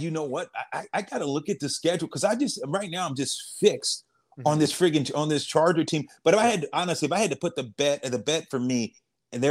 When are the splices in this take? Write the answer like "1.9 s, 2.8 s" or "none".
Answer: none

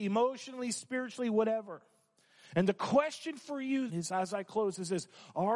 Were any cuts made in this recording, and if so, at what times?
3.9 s

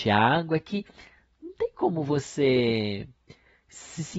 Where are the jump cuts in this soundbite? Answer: none

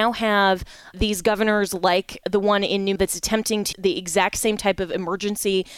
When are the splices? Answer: 0.9 s, 2.2 s, 3.0 s, 3.7 s

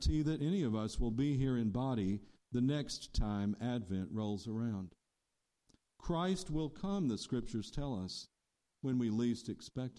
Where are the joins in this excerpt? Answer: none

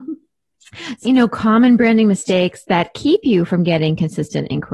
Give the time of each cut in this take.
1.0 s

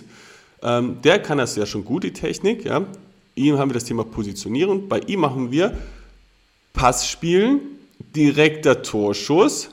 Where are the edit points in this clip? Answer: none

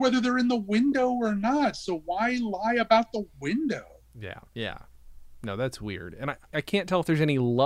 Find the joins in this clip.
4.5 s, 6.5 s

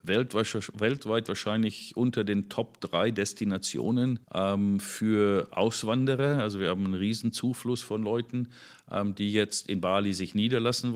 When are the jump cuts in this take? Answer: 4.2 s

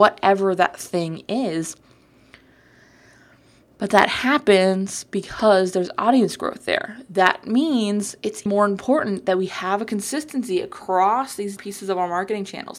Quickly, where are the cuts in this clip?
8.5 s, 11.6 s

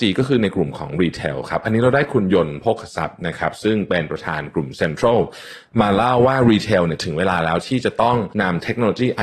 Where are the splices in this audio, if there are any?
8.3 s

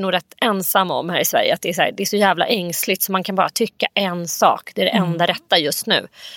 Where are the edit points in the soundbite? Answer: none

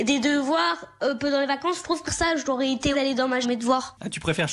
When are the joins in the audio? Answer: 2.1 s, 2.9 s, 3.4 s

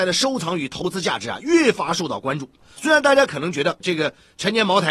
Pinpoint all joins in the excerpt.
3.8 s

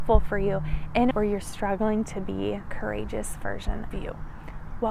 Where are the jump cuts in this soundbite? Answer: 1.1 s, 2.7 s, 3.9 s

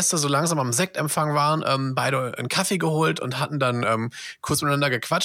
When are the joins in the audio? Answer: none

